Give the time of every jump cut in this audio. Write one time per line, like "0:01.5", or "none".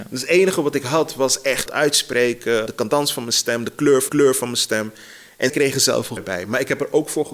0:01.7
0:02.7
0:04.1
0:05.5
0:06.2